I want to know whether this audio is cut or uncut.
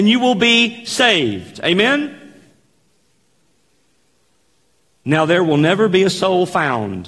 uncut